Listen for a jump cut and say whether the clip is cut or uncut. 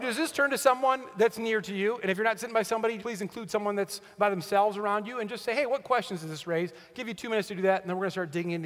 cut